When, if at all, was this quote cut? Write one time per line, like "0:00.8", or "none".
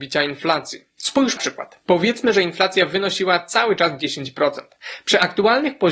0:01.4

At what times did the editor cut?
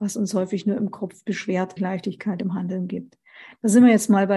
0:01.8

